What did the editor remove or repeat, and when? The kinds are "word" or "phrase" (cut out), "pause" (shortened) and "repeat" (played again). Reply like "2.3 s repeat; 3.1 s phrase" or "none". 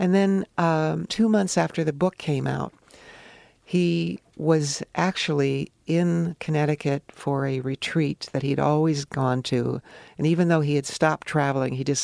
1.1 s word